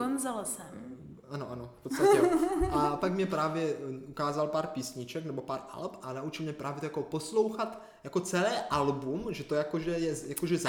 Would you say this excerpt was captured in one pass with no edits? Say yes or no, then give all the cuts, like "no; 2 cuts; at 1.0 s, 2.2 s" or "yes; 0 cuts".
yes; 0 cuts